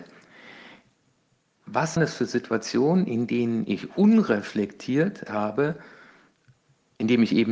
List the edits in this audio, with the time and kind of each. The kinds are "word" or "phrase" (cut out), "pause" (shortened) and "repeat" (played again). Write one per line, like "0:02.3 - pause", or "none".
0:02.0 - word
0:05.3 - word